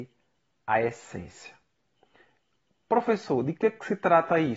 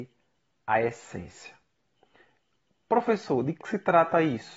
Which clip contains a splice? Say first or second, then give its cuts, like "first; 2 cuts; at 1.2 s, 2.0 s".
second; 1 cut; at 3.6 s